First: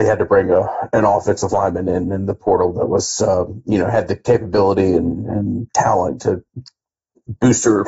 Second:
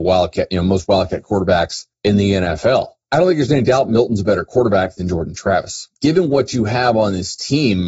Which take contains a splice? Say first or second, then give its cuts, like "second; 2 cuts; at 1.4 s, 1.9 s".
second; 3 cuts; at 1.9 s, 3.0 s, 5.9 s